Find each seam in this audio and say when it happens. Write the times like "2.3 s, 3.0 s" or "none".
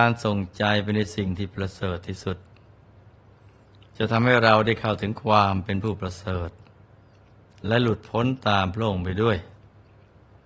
none

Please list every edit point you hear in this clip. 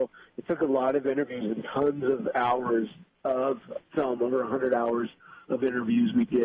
none

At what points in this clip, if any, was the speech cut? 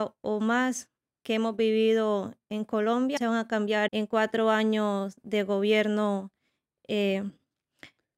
3.2 s, 3.9 s

